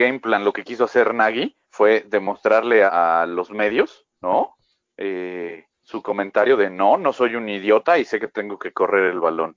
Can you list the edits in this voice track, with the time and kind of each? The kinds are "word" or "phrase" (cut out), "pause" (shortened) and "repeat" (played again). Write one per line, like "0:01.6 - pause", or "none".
0:01.6 - pause
0:02.9 - word
0:04.1 - pause
0:05.7 - pause